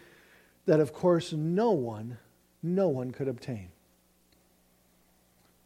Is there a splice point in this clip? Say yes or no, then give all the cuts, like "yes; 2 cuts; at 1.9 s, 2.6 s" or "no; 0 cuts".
no; 0 cuts